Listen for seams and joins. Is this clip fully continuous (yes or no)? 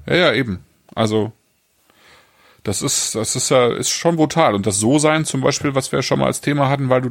yes